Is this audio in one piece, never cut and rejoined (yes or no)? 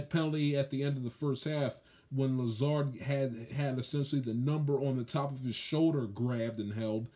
yes